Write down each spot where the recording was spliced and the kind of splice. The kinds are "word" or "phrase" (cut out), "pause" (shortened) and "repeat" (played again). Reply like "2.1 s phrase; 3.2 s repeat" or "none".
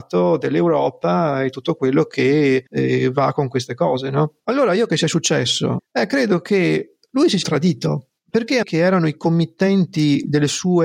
2.7 s pause; 4.4 s pause; 4.9 s phrase; 7.4 s word; 8.2 s pause; 8.6 s phrase